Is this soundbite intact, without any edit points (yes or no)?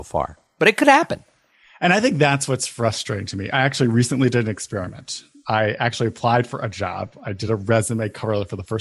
yes